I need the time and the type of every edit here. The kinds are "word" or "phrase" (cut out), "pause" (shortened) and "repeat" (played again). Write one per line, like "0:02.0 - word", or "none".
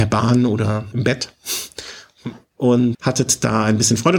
0:00.9 - word
0:02.9 - word